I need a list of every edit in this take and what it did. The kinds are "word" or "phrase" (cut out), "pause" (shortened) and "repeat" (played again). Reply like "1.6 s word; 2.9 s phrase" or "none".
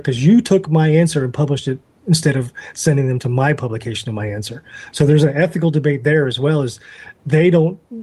none